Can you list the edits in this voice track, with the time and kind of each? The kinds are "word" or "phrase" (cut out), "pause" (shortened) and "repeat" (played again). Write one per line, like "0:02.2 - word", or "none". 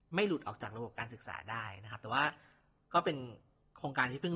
none

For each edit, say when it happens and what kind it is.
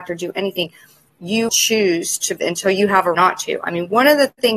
0:01.5 - word
0:02.4 - word
0:03.1 - word

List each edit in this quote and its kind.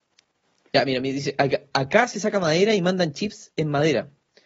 none

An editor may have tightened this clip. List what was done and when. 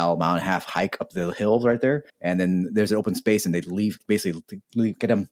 0:02.1 - pause

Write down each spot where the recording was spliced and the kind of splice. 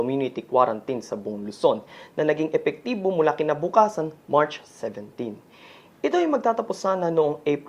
none

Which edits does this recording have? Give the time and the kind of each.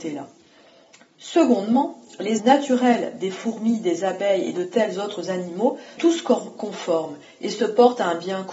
0:02.4 - word
0:06.0 - word

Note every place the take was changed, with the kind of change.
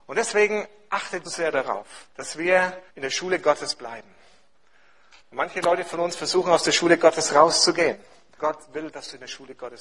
0:01.2 - phrase
0:02.1 - pause
0:02.9 - pause
0:05.2 - pause
0:08.4 - word

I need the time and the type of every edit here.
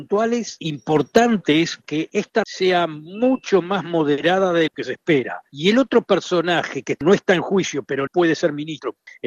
0:01.8 - word
0:02.4 - word
0:04.7 - word
0:08.1 - word

